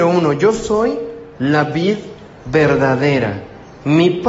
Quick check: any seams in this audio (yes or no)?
yes